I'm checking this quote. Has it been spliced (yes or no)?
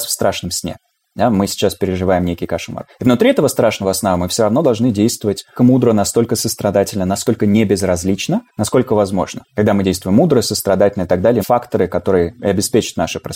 yes